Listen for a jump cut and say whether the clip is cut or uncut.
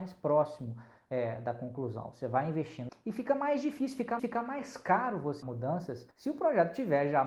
cut